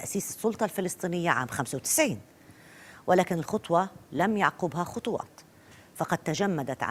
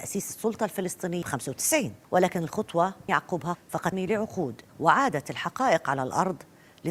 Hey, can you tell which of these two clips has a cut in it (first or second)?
second